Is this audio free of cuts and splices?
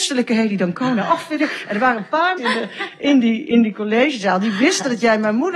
no; 1 cut; at 2.4 s

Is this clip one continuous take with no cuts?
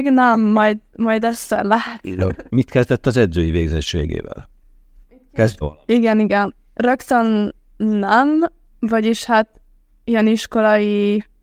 no; 2 cuts; at 2.5 s, 5.6 s

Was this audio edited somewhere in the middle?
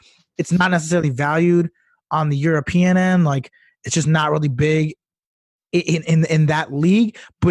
no; 0 cuts

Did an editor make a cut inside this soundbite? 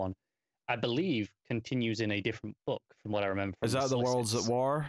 no; 0 cuts

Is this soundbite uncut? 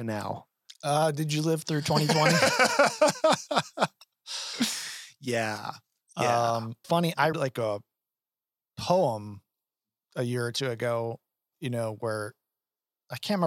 no; 3 cuts; at 6.8 s, 7.3 s, 11.5 s

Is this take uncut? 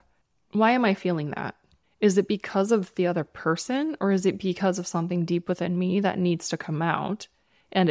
yes; 0 cuts

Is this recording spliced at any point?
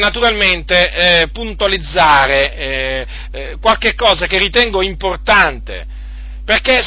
no; 0 cuts

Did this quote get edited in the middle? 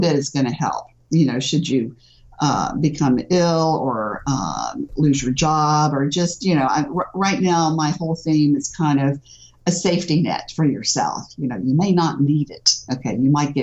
no; 0 cuts

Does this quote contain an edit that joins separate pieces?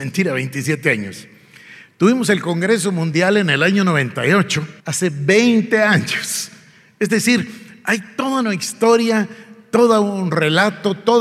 yes; 1 cut; at 4.8 s

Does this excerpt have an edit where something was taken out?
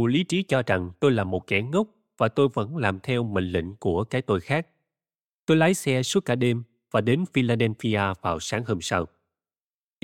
no; 0 cuts

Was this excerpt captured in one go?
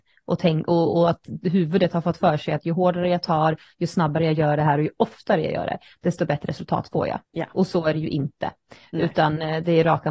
no; 1 cut; at 7.2 s

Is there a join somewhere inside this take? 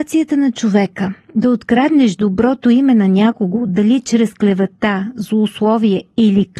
no; 0 cuts

